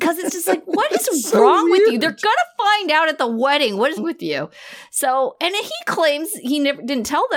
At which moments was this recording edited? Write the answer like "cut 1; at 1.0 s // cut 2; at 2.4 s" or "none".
cut 1; at 4.0 s